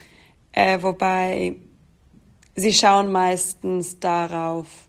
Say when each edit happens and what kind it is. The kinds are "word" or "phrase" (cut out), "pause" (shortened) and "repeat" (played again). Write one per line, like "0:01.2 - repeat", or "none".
none

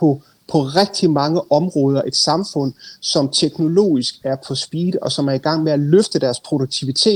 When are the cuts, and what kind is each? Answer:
none

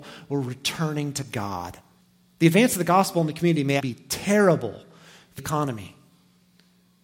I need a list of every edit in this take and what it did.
0:02.0 - pause
0:03.8 - word
0:05.4 - word

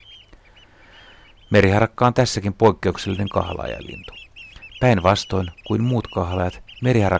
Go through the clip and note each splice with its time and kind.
none

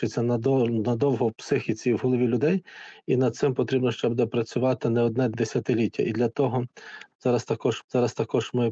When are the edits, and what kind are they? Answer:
0:07.8 - repeat

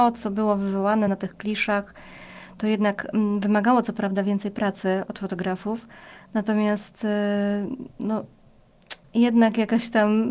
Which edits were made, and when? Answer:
none

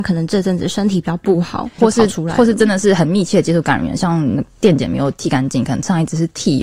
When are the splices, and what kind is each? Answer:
0:01.8 - word

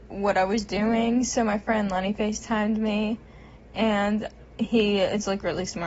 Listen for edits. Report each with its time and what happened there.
none

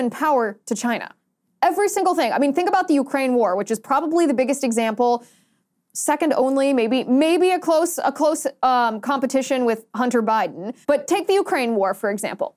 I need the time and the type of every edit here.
0:10.8 - pause

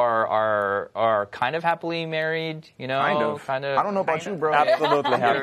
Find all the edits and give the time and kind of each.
none

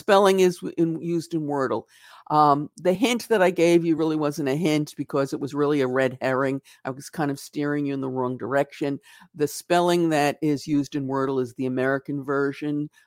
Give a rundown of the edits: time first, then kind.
none

